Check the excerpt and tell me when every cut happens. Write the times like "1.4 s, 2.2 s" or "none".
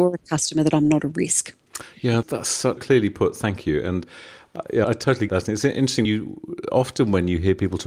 2.2 s, 2.8 s, 4.8 s, 5.3 s, 6.0 s